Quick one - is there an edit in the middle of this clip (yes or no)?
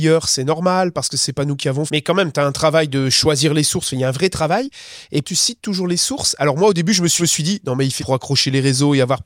yes